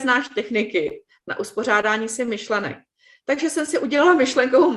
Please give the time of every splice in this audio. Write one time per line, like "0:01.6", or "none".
none

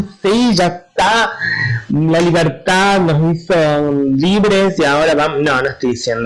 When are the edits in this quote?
none

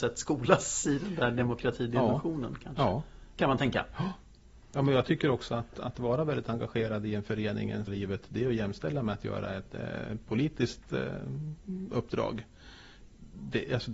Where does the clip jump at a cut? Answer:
0:07.9

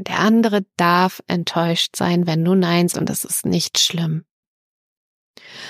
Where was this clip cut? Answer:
0:02.9

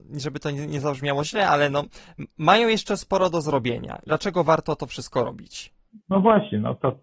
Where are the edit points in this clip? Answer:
0:06.0

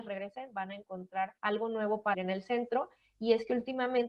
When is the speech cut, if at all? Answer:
0:01.4
0:02.1

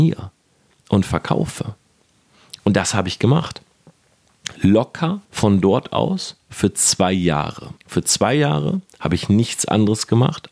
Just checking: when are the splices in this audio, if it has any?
0:05.2
0:07.8

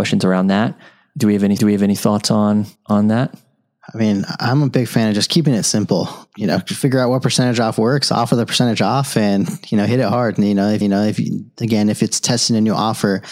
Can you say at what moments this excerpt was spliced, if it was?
0:01.6
0:02.8
0:06.3
0:10.8

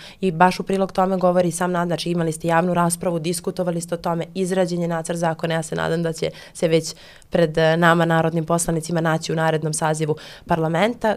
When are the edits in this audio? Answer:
none

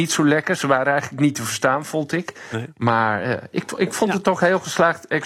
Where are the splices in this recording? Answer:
none

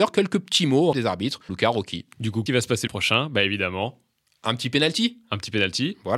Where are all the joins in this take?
0:00.9
0:01.5
0:02.5
0:02.9

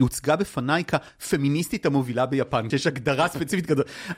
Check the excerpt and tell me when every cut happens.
0:02.7

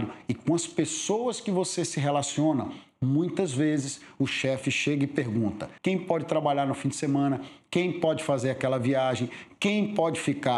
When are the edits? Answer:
0:05.8

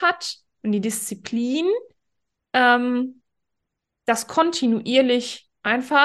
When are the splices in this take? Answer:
none

